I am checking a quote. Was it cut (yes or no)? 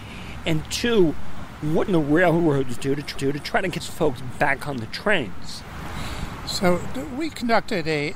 yes